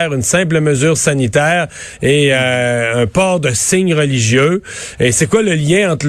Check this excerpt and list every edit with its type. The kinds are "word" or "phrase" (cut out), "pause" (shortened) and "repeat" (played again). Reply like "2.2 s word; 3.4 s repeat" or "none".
none